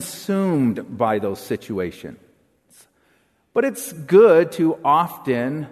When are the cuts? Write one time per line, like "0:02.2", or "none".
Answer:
none